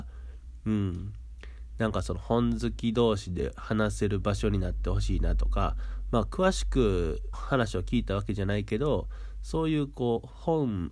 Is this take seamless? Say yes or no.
no